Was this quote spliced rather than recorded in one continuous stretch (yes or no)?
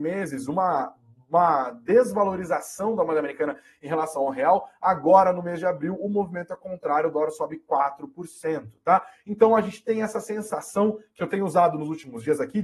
no